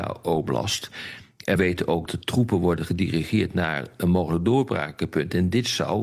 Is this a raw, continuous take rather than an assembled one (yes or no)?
no